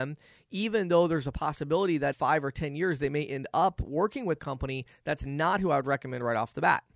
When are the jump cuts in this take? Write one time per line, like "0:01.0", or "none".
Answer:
0:02.1
0:04.4